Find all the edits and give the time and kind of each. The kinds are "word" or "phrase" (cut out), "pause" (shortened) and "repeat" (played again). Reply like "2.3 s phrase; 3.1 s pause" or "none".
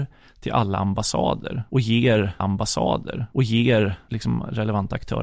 2.4 s repeat

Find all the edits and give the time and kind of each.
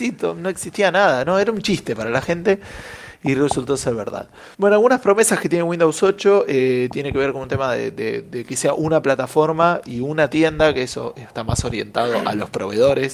4.5 s pause

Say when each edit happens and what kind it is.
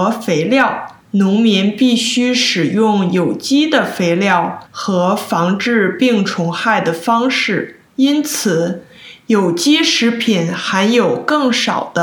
1.0 s pause; 4.7 s pause; 7.9 s pause

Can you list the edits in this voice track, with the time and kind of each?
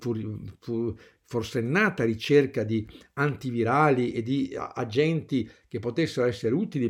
none

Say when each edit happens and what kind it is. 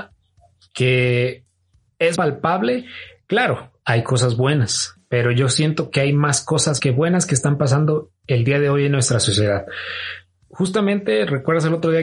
2.2 s word; 6.8 s word

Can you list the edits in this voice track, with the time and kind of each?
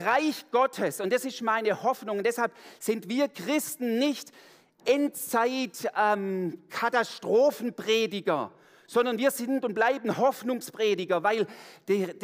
none

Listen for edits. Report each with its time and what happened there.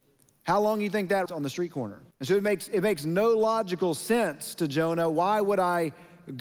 1.3 s phrase; 2.1 s pause

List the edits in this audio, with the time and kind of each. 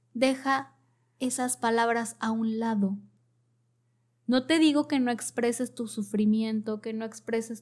none

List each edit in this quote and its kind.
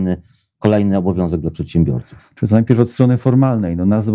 none

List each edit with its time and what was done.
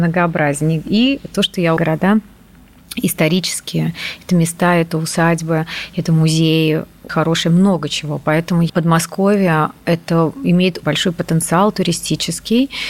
1.8 s phrase; 7.1 s word; 8.7 s phrase; 9.8 s pause; 10.8 s word

